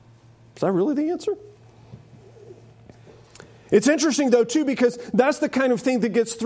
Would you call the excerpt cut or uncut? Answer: uncut